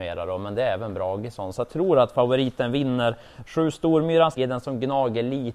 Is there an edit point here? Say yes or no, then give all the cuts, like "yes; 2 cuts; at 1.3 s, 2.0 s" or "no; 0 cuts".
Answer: yes; 2 cuts; at 1.7 s, 4.3 s